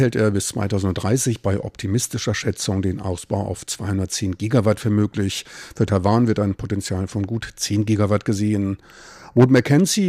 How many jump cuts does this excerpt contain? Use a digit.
0